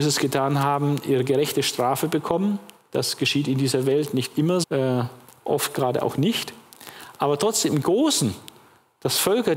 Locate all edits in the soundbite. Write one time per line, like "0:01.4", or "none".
0:04.6